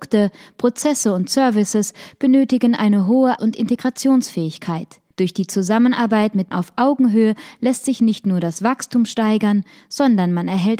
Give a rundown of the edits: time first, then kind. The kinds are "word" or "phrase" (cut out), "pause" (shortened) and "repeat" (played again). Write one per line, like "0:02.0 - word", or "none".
0:03.4 - word
0:05.1 - pause
0:06.5 - word